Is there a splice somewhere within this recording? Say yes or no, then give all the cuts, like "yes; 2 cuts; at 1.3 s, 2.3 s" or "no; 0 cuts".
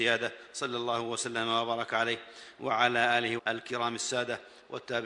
yes; 1 cut; at 3.4 s